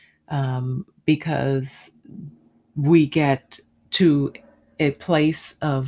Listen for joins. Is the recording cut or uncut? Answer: uncut